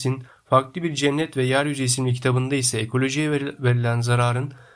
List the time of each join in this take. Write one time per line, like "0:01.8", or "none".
none